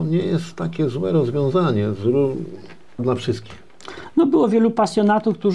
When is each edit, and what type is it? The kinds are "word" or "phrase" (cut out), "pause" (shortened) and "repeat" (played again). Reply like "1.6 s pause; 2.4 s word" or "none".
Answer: 3.0 s word